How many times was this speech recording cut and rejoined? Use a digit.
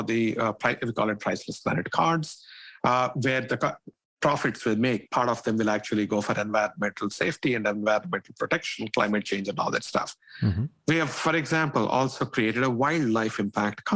0